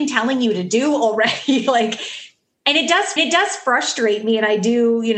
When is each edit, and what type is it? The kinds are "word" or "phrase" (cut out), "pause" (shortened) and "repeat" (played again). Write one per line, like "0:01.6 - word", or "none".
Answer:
0:03.2 - repeat